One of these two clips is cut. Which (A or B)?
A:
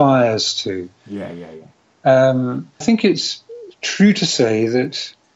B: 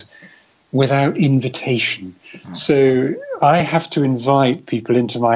A